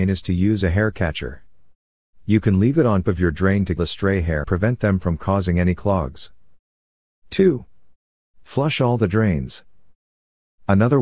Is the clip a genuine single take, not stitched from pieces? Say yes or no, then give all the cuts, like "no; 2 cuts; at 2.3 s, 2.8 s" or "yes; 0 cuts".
no; 3 cuts; at 3.0 s, 3.8 s, 4.4 s